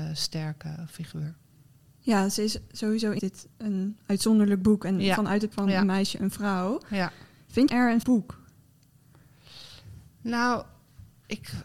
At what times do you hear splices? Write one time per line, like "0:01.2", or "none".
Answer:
0:03.2
0:05.5
0:07.7
0:08.0